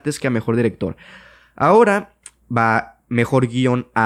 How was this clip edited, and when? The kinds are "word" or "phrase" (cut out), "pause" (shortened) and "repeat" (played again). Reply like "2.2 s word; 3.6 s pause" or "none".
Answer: 2.4 s word

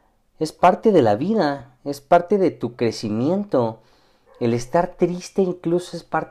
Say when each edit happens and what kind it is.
none

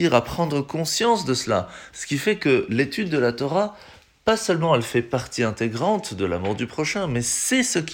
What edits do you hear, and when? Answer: none

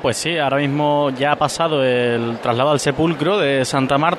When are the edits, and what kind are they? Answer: none

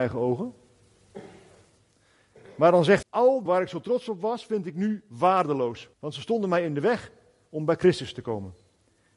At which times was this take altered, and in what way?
3.0 s word; 3.5 s phrase; 5.9 s pause

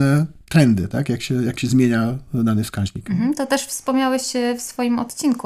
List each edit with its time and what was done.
none

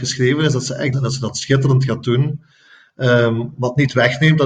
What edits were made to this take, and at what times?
0.9 s phrase

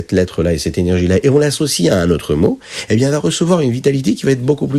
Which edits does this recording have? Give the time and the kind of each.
none

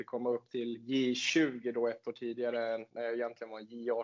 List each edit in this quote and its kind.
none

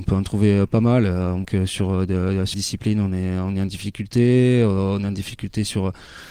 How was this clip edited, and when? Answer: 1.4 s word; 2.5 s word

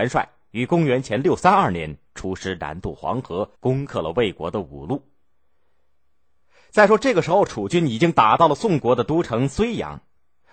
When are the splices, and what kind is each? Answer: 3.5 s pause

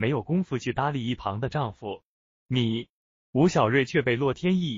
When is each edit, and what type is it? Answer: none

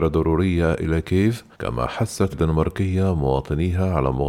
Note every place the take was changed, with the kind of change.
1.5 s pause; 2.3 s word

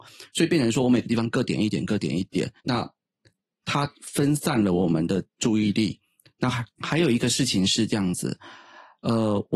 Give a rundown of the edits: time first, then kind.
2.6 s pause; 5.3 s pause; 6.7 s pause

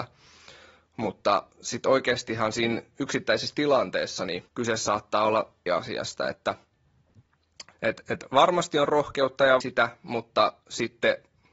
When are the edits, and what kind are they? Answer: 4.5 s pause; 5.7 s phrase; 7.7 s pause; 9.6 s word

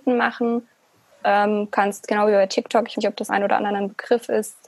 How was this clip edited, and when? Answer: 2.9 s word; 3.3 s word

